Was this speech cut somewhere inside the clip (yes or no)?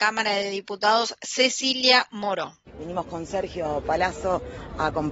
yes